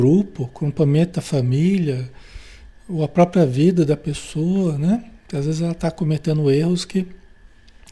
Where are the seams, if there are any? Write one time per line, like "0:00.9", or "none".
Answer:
none